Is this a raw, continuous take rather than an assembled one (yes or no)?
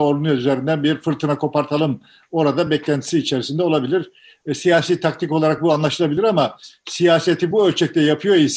yes